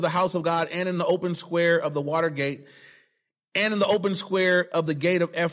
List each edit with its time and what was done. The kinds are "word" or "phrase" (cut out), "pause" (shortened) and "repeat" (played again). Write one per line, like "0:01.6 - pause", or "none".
none